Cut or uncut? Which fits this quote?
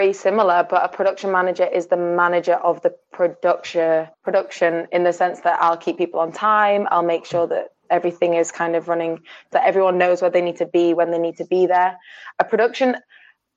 cut